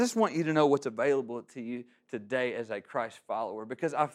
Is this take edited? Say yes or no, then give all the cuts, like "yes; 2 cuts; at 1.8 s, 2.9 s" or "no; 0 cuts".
no; 0 cuts